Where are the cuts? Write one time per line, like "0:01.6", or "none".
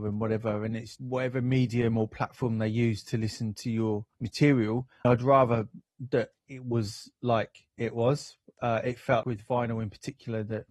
0:01.0
0:04.1
0:05.0
0:06.4
0:07.7
0:09.2

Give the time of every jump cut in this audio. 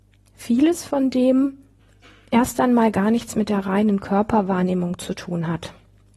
none

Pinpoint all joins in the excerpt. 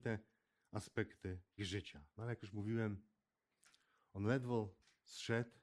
0:01.6
0:02.1

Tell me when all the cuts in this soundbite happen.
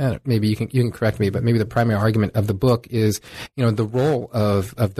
none

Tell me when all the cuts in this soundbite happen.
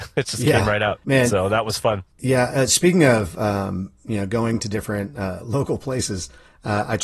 0:01.0
0:02.1

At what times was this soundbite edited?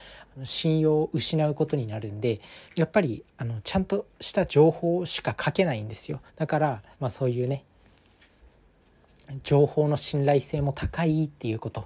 0:02.7
0:06.3
0:06.9

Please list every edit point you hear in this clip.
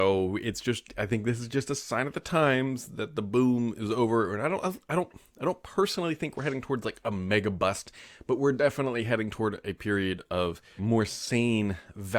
0:10.8

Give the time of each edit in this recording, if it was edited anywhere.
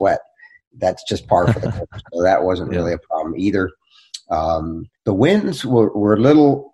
0:04.9

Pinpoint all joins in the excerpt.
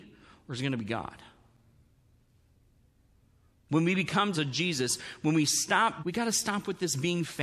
0:04.3
0:06.0

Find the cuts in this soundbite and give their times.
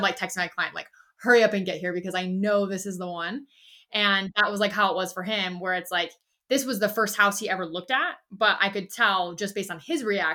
none

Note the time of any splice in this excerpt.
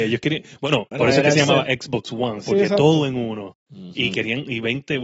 0:00.9

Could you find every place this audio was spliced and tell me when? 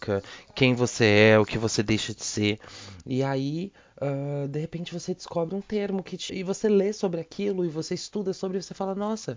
0:06.3

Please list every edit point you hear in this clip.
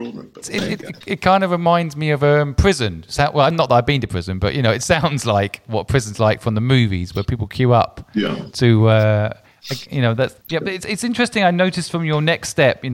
0:10.4

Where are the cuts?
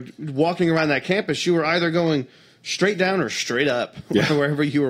none

